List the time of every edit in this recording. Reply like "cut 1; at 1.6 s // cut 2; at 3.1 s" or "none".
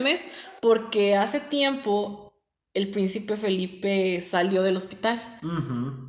none